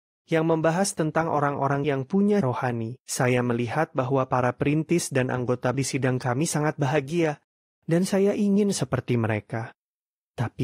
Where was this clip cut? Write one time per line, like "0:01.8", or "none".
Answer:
0:01.8
0:02.4
0:03.0
0:05.7